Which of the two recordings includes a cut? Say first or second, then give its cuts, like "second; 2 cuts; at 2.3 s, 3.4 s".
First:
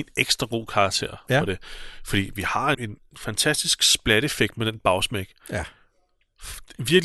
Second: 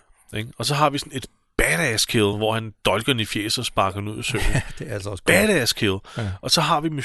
first; 1 cut; at 2.7 s